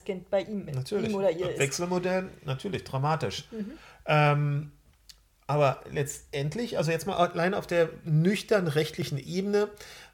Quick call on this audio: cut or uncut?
uncut